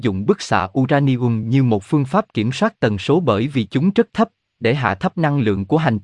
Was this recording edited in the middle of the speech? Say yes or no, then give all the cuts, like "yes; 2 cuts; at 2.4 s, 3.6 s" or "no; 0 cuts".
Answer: no; 0 cuts